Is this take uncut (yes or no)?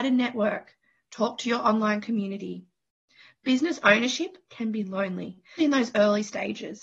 no